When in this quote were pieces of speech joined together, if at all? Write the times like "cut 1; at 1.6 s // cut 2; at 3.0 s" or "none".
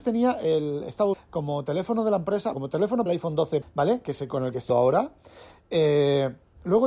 cut 1; at 1.1 s // cut 2; at 2.5 s // cut 3; at 3.1 s // cut 4; at 3.6 s // cut 5; at 4.7 s

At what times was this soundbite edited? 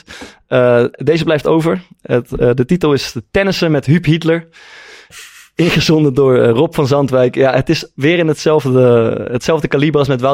none

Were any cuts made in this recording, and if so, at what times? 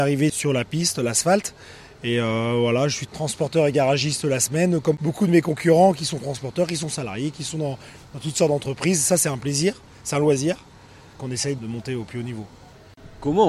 none

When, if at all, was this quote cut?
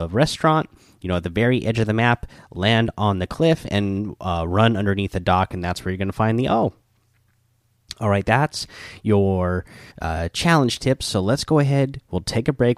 cut 1; at 9.9 s

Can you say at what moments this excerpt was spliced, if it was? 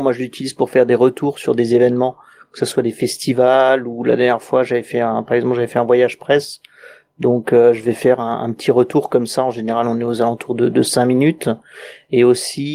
none

